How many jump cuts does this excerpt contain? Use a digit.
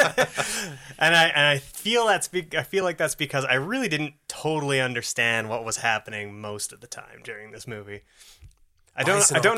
0